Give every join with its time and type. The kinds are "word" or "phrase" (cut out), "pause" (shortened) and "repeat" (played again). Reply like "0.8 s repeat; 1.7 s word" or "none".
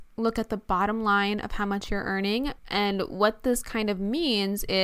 2.6 s pause